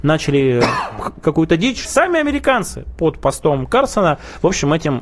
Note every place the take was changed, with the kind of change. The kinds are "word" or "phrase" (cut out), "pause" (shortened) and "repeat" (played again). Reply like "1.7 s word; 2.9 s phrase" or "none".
1.2 s word; 1.8 s word